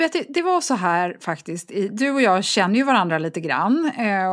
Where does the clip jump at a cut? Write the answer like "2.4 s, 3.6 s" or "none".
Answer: none